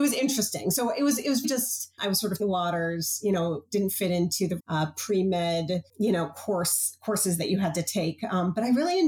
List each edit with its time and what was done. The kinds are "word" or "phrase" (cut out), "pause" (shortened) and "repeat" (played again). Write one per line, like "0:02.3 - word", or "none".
0:01.4 - word
0:02.4 - word
0:04.6 - word